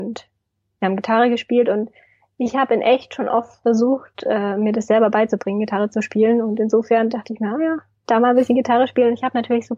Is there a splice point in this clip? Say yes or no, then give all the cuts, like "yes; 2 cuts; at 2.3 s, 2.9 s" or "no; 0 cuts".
no; 0 cuts